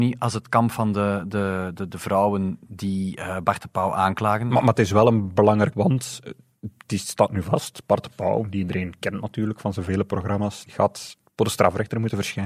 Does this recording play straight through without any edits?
no; 2 cuts; at 5.7 s, 10.7 s

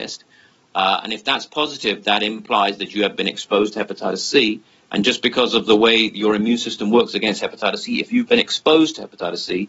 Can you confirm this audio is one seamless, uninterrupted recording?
yes; 0 cuts

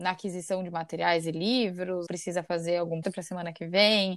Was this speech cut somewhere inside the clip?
yes; 2 cuts; at 2.1 s, 3.0 s

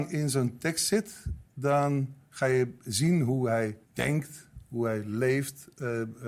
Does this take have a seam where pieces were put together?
yes; 1 cut; at 3.8 s

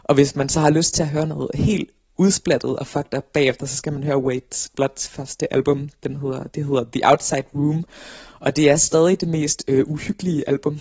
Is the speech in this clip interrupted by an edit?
no; 0 cuts

